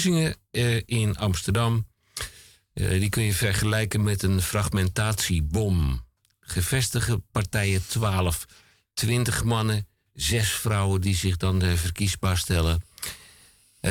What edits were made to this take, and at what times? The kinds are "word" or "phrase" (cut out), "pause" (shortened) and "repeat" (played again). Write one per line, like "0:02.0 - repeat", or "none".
none